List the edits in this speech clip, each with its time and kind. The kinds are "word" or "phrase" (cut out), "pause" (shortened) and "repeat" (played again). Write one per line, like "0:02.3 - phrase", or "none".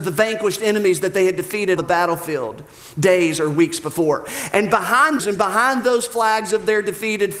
0:01.8 - word
0:05.2 - phrase